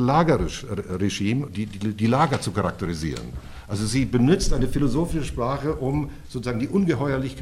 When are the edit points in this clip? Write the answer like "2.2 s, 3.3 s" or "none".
none